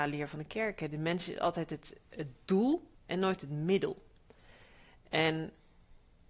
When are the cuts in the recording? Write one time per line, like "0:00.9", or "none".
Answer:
0:02.9